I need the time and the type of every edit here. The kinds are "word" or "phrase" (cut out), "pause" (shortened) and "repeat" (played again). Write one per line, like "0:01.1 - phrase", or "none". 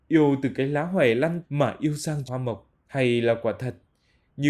0:01.4 - word
0:02.2 - word
0:02.8 - pause